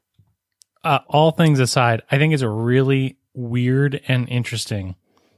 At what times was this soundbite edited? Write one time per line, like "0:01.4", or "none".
0:01.0
0:03.3